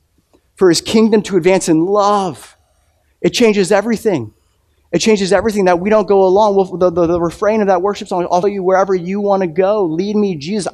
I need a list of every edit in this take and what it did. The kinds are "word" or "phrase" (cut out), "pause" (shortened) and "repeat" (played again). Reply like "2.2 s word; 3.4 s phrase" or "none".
8.4 s word